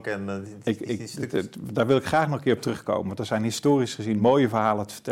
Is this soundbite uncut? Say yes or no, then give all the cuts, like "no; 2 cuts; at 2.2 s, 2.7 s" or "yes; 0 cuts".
yes; 0 cuts